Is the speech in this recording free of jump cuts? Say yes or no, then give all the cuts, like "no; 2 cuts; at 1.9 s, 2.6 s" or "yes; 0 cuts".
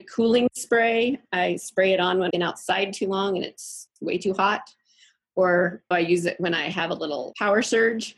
no; 3 cuts; at 2.3 s, 3.9 s, 5.9 s